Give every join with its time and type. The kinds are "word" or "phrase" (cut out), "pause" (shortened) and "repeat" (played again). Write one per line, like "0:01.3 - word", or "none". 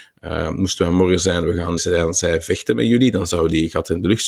0:01.8 - word